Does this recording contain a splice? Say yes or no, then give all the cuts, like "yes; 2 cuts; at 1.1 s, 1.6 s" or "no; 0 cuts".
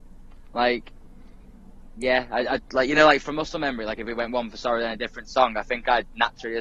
no; 0 cuts